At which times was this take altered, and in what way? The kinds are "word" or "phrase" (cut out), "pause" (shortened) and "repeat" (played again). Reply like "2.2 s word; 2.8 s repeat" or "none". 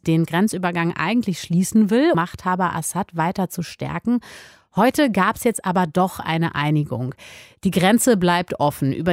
2.1 s word